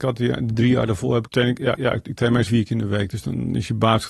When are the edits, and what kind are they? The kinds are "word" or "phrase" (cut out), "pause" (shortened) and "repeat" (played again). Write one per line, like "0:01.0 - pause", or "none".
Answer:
0:01.3 - word
0:01.8 - repeat
0:02.5 - word